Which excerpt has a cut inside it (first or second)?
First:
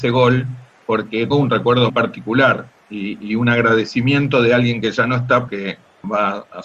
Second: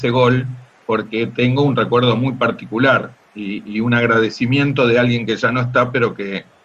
first